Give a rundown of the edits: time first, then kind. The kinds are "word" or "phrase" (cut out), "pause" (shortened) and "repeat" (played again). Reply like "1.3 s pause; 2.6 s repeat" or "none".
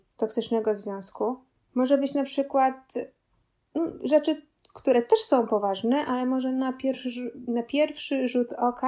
none